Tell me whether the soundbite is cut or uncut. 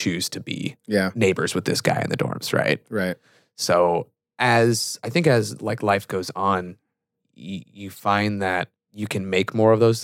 uncut